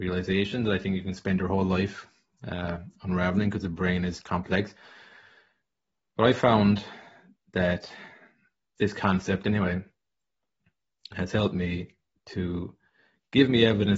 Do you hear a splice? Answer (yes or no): no